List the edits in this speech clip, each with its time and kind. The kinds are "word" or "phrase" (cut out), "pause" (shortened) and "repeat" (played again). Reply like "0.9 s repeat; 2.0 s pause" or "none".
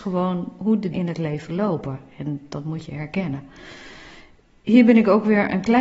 0.9 s word